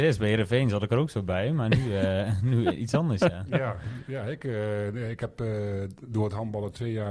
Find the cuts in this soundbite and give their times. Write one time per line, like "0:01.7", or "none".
none